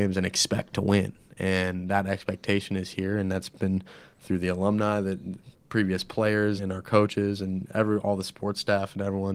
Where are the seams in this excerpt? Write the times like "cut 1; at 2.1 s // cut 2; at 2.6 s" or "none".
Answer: cut 1; at 6.6 s